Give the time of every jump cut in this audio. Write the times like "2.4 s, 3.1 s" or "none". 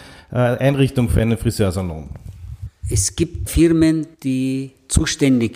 3.5 s, 4.1 s